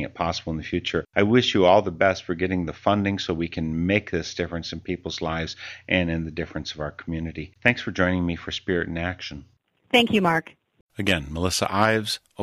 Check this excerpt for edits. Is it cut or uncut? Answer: uncut